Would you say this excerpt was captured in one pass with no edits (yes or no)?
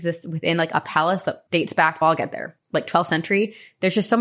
no